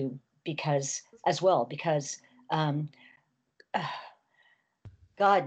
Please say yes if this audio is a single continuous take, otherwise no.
yes